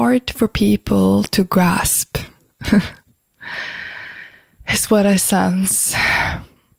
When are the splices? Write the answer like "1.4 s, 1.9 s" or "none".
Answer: 3.0 s

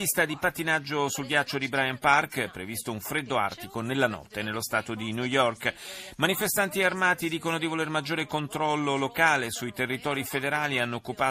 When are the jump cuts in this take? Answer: none

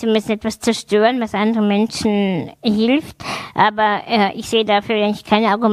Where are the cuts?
none

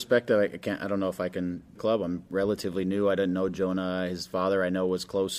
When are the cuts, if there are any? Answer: 1.8 s

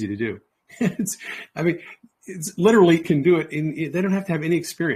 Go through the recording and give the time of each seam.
3.0 s

